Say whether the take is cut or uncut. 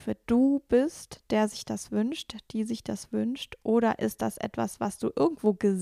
uncut